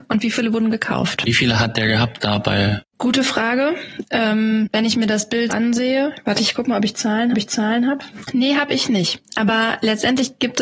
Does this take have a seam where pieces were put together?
yes; 2 cuts; at 5.5 s, 7.3 s

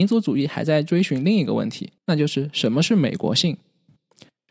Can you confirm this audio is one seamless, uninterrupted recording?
no; 1 cut; at 2.0 s

